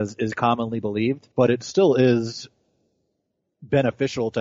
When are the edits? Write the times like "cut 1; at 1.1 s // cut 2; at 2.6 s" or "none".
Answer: cut 1; at 1.3 s